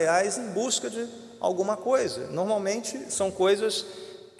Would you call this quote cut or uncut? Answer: uncut